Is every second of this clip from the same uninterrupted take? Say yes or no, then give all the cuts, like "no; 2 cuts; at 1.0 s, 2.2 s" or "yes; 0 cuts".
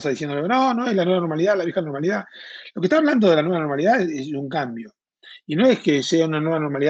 yes; 0 cuts